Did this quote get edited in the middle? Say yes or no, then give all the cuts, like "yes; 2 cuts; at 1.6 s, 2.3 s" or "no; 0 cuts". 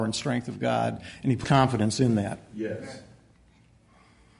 yes; 1 cut; at 1.4 s